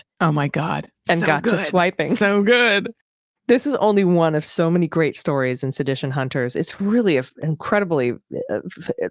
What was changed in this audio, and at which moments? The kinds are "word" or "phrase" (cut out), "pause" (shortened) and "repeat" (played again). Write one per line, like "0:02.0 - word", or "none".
0:03.0 - pause